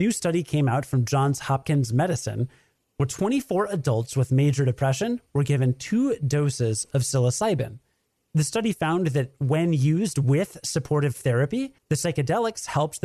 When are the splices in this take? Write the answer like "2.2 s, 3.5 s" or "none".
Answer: 11.8 s